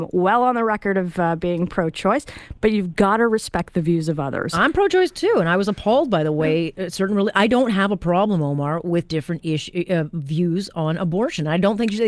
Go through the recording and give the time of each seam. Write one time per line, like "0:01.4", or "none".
0:09.1